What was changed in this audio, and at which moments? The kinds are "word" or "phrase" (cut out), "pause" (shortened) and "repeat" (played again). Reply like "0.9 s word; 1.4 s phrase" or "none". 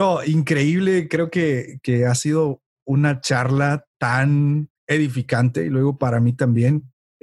4.8 s pause